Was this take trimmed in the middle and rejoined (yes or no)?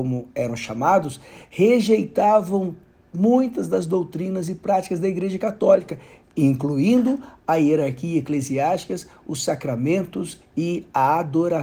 no